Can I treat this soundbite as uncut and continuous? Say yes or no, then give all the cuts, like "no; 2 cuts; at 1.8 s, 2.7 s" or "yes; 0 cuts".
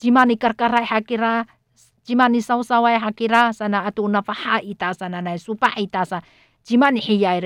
yes; 0 cuts